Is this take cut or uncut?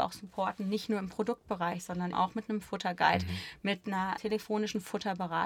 cut